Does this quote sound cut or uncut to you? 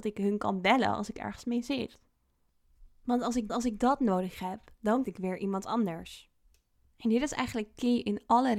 cut